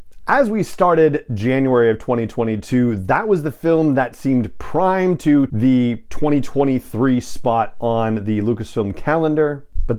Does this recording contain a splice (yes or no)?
yes